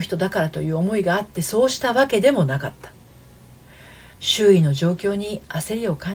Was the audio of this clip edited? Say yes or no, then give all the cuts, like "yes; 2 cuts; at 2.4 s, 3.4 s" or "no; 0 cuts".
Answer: yes; 1 cut; at 4.1 s